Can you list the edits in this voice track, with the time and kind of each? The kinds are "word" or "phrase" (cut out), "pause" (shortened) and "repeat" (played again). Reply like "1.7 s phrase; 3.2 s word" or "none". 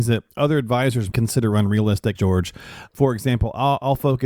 1.1 s word; 2.1 s word